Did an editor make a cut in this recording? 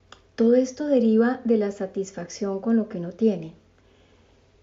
no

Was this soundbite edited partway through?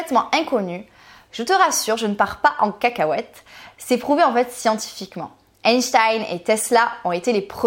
no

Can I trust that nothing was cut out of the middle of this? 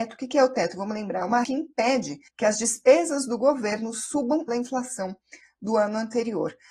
no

